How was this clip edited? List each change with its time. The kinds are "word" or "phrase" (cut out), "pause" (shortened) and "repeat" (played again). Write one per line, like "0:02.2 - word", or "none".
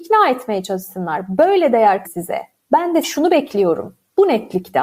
0:02.0 - word
0:03.0 - word